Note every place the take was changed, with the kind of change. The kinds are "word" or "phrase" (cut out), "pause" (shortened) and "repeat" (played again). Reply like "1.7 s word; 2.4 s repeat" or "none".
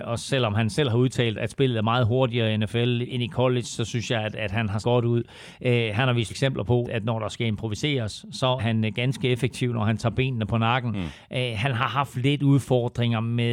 1.3 s word; 3.0 s word; 4.8 s word; 6.3 s word; 6.8 s word; 8.6 s word